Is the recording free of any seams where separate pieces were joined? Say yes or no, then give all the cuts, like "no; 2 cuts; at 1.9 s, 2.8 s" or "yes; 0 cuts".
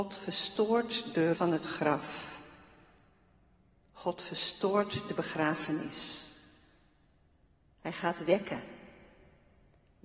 no; 1 cut; at 1.3 s